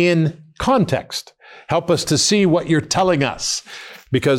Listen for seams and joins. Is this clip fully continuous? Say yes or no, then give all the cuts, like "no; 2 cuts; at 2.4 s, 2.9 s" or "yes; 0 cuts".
yes; 0 cuts